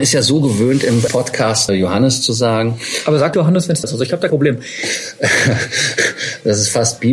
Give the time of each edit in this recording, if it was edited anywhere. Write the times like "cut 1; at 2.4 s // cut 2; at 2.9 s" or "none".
cut 1; at 1.1 s // cut 2; at 1.7 s // cut 3; at 3.3 s // cut 4; at 3.8 s // cut 5; at 4.3 s

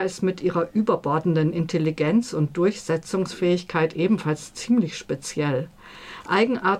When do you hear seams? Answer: none

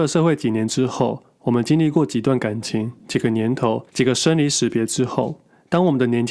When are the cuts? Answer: cut 1; at 3.9 s

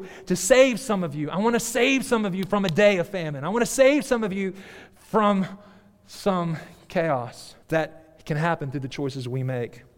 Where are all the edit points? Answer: cut 1; at 7.6 s

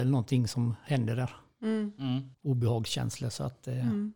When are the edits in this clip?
cut 1; at 2.3 s

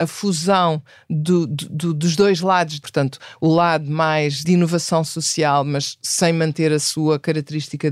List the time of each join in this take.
cut 1; at 2.8 s // cut 2; at 4.4 s

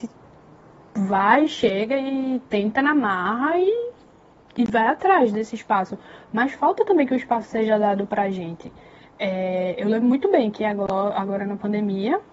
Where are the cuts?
none

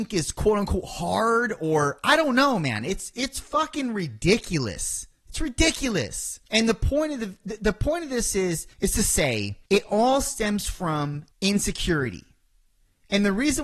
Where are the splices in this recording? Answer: cut 1; at 6.4 s // cut 2; at 8.7 s // cut 3; at 9.7 s // cut 4; at 11.3 s

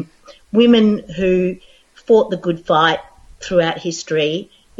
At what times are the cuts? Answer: none

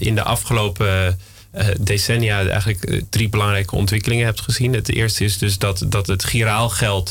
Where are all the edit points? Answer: none

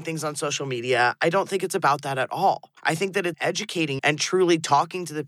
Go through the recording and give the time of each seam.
cut 1; at 2.8 s // cut 2; at 3.3 s // cut 3; at 4.0 s

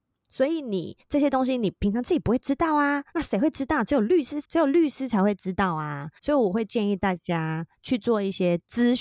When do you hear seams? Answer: cut 1; at 3.1 s // cut 2; at 4.4 s // cut 3; at 6.2 s

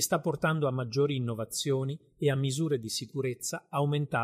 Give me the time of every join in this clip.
none

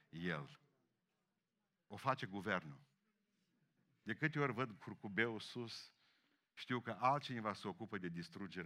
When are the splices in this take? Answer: none

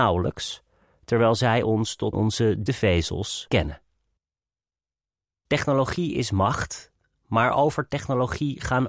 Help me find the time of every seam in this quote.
cut 1; at 2.1 s // cut 2; at 2.7 s // cut 3; at 3.5 s

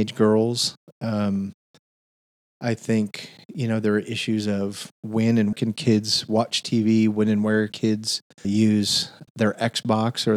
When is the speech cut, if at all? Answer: cut 1; at 5.5 s // cut 2; at 7.7 s // cut 3; at 8.4 s // cut 4; at 9.3 s

